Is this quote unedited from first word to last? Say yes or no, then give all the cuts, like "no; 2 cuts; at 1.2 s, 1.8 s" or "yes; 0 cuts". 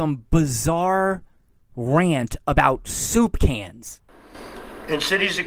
yes; 0 cuts